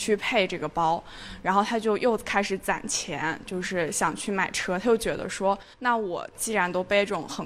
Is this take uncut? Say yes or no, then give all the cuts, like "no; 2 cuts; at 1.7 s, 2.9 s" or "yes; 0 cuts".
no; 1 cut; at 5.7 s